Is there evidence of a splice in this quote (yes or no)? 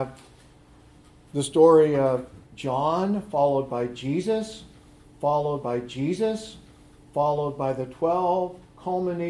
yes